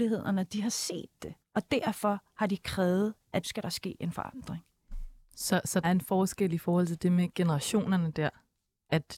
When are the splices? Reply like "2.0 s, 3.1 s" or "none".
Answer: 1.4 s, 3.4 s, 5.8 s